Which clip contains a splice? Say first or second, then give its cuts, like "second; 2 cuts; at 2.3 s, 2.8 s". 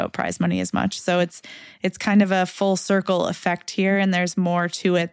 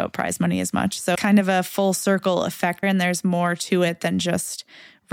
second; 2 cuts; at 1.1 s, 2.8 s